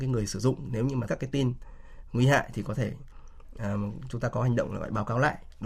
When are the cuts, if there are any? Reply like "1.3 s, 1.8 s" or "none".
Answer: 1.1 s